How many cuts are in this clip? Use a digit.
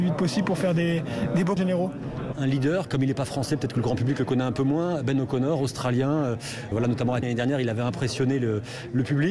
4